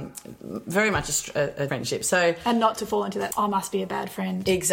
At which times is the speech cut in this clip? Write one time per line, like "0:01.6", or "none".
0:01.7
0:03.3

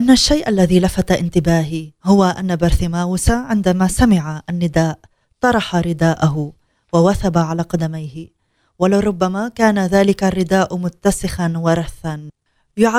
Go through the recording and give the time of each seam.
none

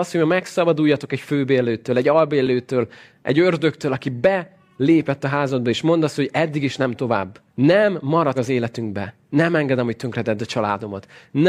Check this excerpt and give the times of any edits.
0:07.5
0:08.3

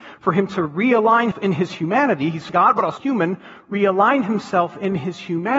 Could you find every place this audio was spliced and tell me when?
0:01.3
0:02.5
0:03.0

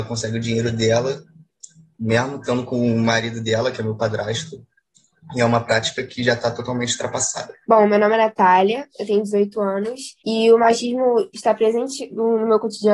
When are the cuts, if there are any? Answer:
0:07.6
0:10.2

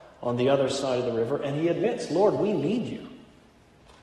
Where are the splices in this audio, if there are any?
none

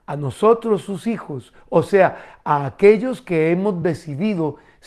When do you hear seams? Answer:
none

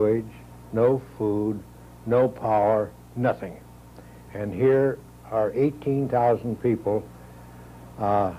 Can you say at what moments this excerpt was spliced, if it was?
none

